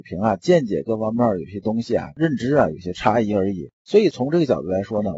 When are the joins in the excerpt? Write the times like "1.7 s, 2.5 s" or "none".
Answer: 3.7 s